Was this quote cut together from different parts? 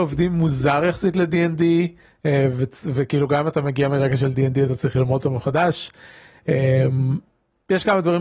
no; 0 cuts

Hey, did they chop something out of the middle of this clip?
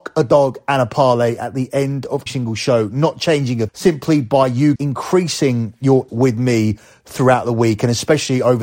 yes; 4 cuts; at 2.3 s, 3.7 s, 4.7 s, 6.1 s

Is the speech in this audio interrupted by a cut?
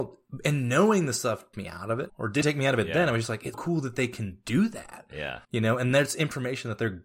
yes; 5 cuts; at 1.5 s, 2.1 s, 2.4 s, 3.5 s, 5.4 s

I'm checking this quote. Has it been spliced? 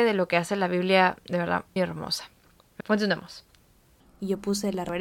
yes; 2 cuts; at 1.8 s, 2.8 s

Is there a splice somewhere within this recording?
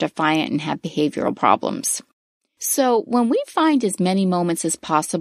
no; 0 cuts

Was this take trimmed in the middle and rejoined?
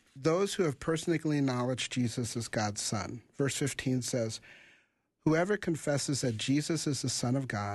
no; 0 cuts

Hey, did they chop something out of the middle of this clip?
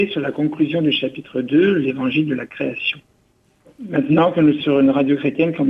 yes; 1 cut; at 4.6 s

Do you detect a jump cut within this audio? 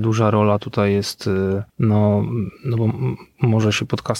yes; 1 cut; at 1.7 s

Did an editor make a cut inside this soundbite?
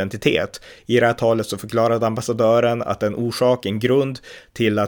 no; 0 cuts

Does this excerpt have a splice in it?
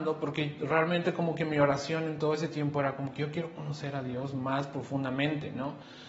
no; 0 cuts

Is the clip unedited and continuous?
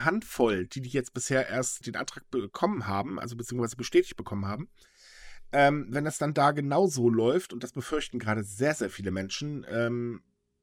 no; 1 cut; at 1.8 s

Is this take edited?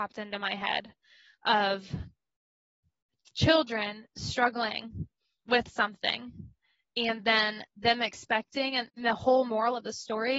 yes; 1 cut; at 8.9 s

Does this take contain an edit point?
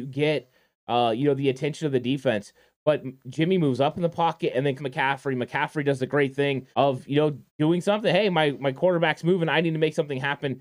yes; 3 cuts; at 4.8 s, 6.7 s, 7.5 s

